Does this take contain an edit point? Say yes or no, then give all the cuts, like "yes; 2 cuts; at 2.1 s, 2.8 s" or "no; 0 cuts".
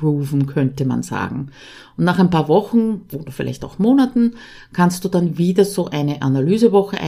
no; 0 cuts